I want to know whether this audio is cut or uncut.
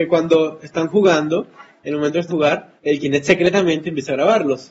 cut